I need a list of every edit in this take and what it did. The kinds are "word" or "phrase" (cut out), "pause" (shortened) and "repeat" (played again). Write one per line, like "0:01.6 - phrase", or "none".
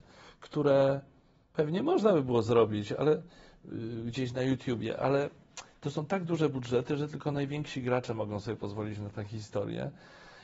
none

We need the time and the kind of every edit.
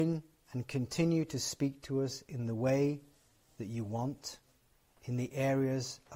none

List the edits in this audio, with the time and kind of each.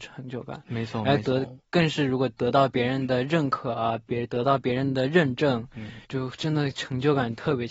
0:06.0 - pause

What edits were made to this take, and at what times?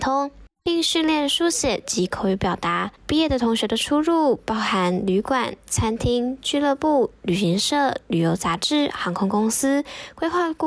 0:03.0 - pause

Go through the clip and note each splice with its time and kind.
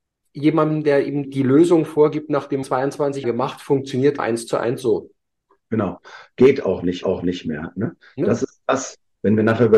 0:01.2 - word
0:02.6 - phrase
0:03.2 - word
0:04.2 - word
0:07.0 - repeat

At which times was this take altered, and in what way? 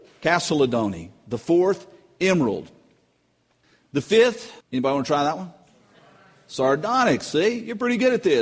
0:04.6 - pause

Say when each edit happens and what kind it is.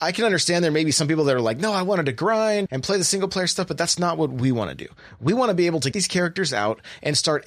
0:02.7 - word
0:05.9 - word

